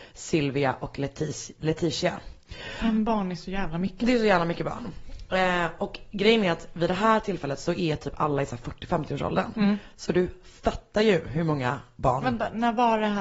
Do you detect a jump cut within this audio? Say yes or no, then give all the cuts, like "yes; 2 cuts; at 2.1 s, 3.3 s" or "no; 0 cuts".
no; 0 cuts